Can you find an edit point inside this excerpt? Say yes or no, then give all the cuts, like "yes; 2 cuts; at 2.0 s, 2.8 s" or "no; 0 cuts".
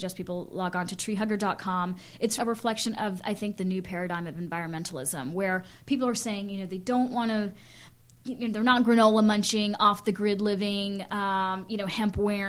yes; 1 cut; at 2.4 s